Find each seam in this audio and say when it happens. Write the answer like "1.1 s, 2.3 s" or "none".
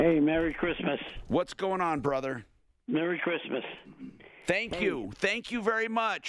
none